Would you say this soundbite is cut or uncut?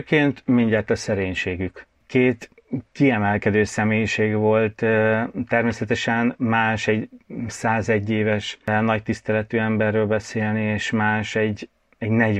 uncut